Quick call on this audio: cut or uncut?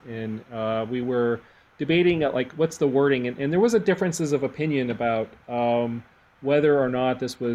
uncut